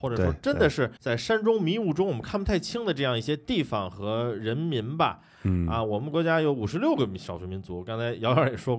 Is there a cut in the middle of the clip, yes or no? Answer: yes